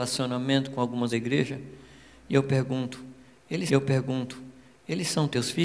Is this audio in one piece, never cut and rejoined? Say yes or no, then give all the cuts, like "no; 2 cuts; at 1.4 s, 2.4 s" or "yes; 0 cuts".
no; 2 cuts; at 1.1 s, 3.7 s